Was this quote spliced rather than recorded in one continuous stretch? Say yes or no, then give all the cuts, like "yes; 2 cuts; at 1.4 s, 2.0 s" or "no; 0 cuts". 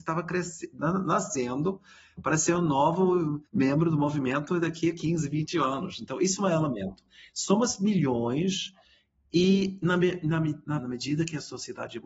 yes; 2 cuts; at 3.5 s, 10.8 s